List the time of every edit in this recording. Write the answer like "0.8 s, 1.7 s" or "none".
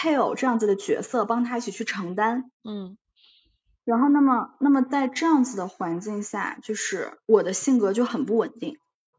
2.5 s, 7.2 s